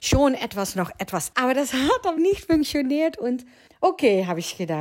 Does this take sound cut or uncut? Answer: cut